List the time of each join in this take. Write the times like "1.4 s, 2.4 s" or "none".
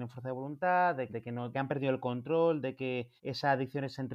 1.1 s, 1.5 s, 3.2 s